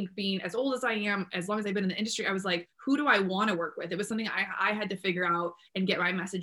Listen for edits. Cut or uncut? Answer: uncut